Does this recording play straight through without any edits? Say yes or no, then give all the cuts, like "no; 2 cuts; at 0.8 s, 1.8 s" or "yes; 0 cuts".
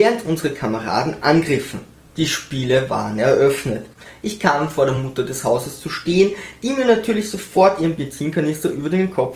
yes; 0 cuts